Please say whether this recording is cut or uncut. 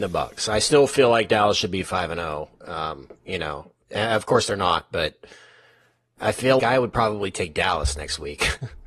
cut